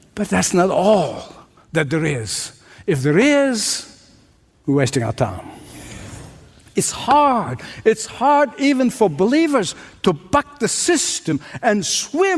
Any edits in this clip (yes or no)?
no